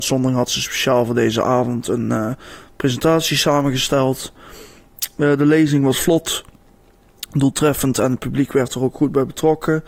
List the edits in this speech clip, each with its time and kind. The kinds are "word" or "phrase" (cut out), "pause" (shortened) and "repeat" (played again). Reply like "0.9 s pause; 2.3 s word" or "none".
none